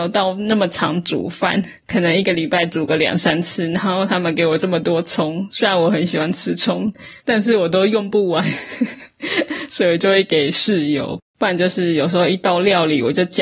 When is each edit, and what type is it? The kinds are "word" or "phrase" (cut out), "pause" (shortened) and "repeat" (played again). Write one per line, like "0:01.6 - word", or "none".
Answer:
0:01.8 - pause
0:07.2 - pause